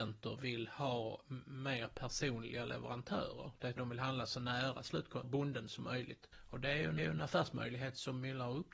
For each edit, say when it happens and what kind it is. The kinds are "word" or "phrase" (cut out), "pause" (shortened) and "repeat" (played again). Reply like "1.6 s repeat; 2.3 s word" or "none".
3.8 s word; 5.2 s word; 6.3 s pause; 7.0 s repeat